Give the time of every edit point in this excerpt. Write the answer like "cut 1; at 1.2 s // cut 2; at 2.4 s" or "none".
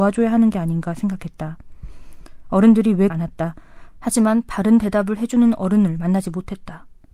cut 1; at 3.1 s